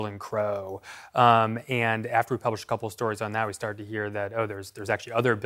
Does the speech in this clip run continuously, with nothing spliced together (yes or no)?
yes